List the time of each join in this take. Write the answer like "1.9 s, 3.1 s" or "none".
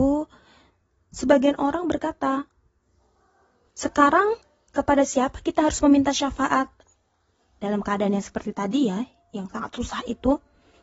none